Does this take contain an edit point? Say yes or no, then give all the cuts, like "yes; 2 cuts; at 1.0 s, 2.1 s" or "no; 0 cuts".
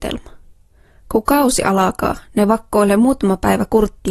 no; 0 cuts